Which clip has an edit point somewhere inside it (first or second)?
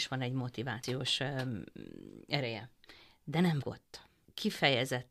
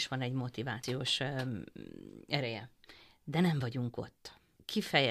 first